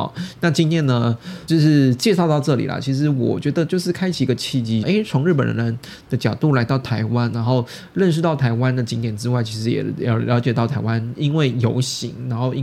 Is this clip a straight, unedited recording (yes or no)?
no